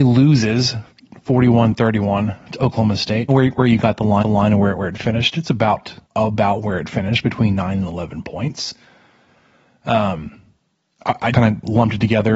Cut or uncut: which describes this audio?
cut